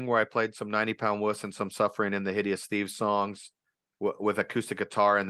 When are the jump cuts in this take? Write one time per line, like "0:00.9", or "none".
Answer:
none